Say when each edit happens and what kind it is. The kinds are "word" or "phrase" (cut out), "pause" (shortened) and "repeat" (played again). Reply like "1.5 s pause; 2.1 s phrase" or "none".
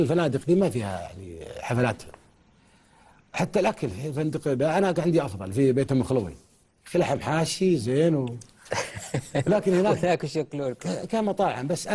6.6 s pause